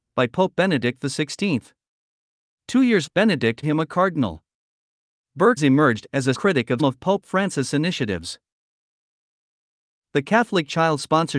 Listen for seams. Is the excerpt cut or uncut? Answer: cut